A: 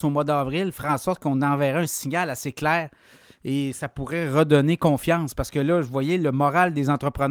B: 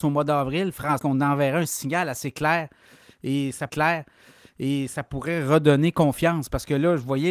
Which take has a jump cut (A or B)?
B